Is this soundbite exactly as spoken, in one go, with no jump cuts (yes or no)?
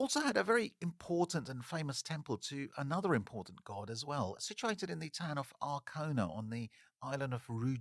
yes